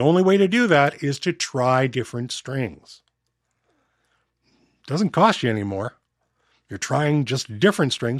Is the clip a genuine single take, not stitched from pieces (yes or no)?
yes